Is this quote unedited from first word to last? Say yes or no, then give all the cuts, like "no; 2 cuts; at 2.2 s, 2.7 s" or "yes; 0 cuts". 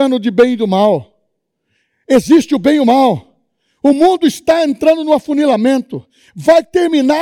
yes; 0 cuts